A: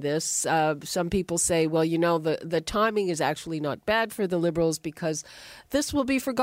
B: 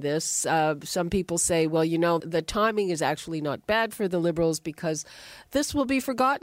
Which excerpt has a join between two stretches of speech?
B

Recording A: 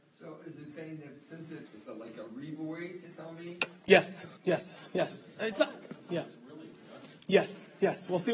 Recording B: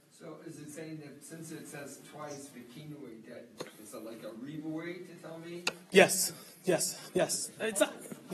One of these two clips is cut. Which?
A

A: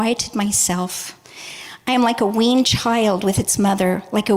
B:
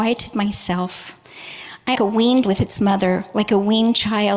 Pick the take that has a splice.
B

